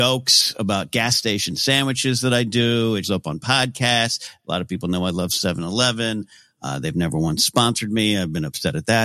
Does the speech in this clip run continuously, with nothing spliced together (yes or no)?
no